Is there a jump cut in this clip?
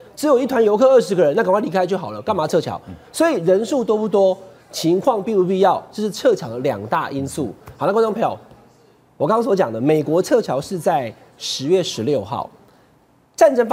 no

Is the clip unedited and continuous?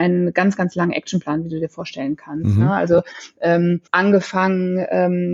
no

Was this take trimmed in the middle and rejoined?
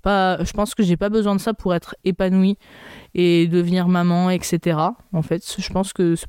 no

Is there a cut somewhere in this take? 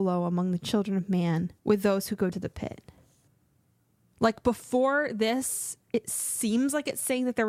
yes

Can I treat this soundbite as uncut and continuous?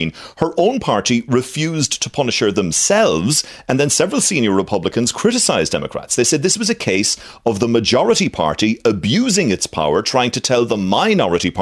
yes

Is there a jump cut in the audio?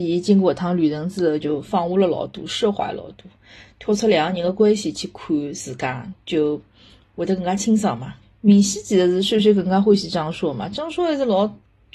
yes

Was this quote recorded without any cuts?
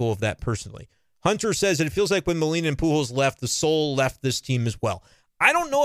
yes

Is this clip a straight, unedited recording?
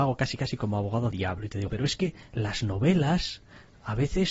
no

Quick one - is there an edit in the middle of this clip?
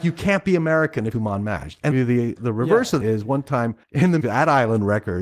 yes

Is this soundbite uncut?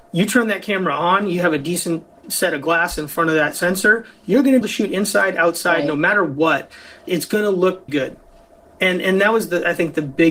no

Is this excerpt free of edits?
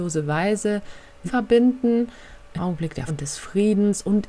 no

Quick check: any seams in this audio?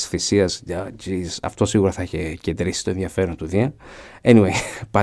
no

